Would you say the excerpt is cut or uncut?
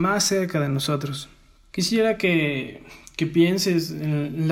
uncut